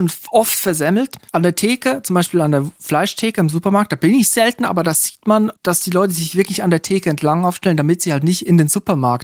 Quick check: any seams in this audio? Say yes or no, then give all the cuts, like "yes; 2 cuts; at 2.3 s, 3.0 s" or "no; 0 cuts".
yes; 1 cut; at 5.6 s